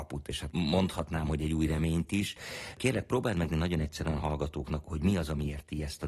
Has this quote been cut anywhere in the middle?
yes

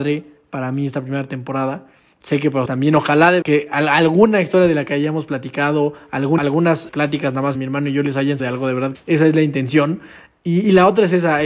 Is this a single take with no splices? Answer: no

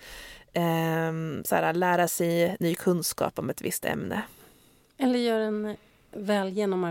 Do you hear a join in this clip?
no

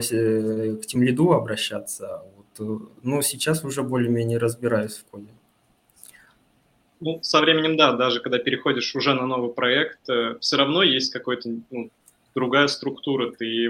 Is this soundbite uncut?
yes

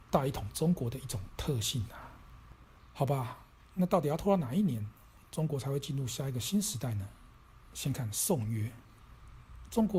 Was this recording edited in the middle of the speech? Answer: no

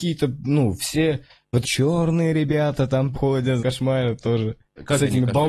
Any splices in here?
yes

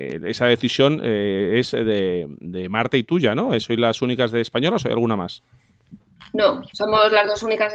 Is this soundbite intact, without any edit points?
yes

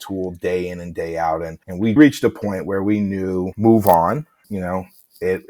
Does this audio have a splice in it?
yes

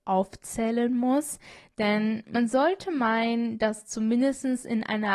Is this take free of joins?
yes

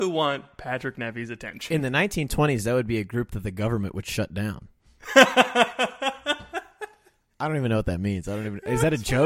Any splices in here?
no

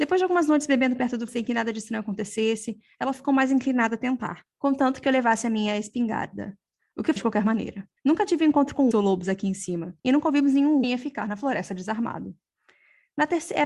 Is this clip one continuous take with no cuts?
no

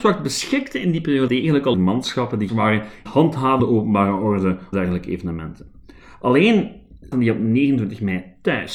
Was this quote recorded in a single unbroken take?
no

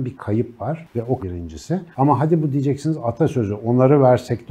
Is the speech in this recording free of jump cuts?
no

